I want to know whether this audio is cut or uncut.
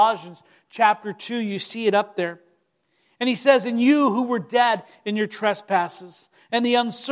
uncut